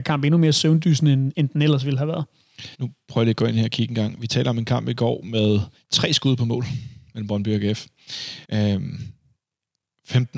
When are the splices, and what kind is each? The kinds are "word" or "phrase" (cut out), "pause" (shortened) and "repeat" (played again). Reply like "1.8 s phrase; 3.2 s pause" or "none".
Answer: 2.7 s pause; 5.8 s pause; 7.1 s pause; 8.4 s pause